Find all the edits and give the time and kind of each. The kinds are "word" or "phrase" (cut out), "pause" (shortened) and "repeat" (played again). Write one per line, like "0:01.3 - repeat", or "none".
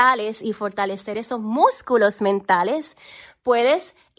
none